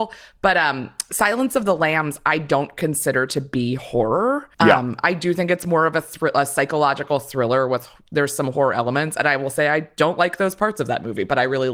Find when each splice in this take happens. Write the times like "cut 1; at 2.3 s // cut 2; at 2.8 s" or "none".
cut 1; at 4.5 s